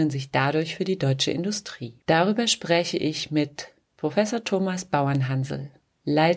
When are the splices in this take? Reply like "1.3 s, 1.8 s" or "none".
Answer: 2.0 s